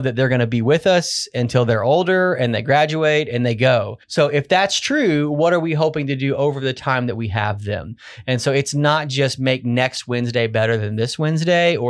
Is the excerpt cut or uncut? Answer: cut